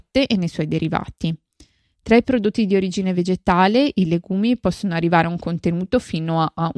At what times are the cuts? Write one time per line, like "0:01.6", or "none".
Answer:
none